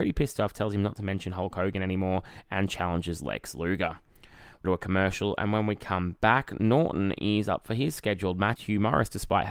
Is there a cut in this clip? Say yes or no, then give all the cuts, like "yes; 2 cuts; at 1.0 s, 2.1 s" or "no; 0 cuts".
yes; 2 cuts; at 4.6 s, 8.6 s